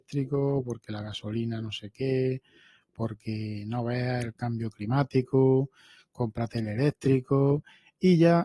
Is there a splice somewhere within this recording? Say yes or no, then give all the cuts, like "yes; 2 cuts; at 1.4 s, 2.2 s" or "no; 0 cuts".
no; 0 cuts